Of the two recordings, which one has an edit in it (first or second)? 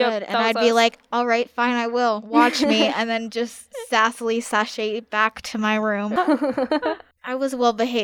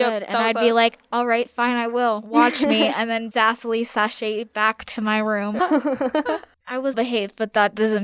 second